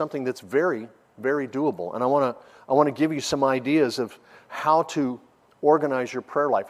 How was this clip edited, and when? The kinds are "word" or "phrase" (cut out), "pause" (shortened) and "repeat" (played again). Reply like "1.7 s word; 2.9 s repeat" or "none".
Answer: none